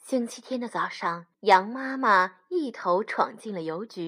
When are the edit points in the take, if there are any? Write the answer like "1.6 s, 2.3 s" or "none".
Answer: 1.3 s